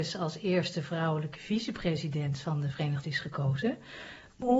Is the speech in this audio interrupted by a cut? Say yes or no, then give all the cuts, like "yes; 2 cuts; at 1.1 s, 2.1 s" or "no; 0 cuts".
yes; 1 cut; at 3.0 s